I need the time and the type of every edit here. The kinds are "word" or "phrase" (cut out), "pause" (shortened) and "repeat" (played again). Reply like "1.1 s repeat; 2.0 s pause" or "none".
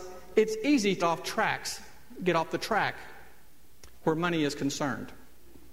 1.0 s word